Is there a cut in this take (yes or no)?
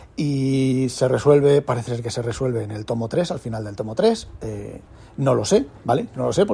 no